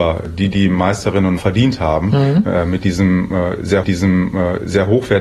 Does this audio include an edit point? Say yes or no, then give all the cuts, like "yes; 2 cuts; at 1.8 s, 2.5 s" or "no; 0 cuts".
yes; 2 cuts; at 1.4 s, 3.8 s